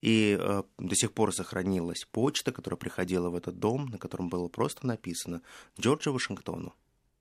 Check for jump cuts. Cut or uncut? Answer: uncut